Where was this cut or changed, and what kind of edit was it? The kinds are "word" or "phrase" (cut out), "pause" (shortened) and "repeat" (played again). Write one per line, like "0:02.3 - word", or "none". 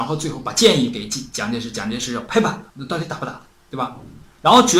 0:02.7 - pause
0:03.5 - pause